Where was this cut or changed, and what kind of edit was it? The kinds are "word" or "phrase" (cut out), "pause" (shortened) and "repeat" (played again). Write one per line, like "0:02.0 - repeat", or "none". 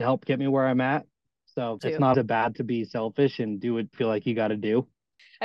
0:01.8 - word
0:02.1 - word
0:02.5 - word
0:03.9 - word